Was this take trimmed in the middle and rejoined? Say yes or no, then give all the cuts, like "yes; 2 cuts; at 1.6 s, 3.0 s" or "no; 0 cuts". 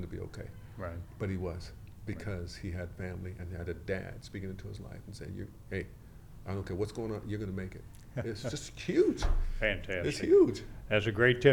no; 0 cuts